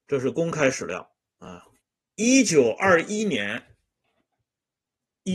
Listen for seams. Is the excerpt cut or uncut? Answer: cut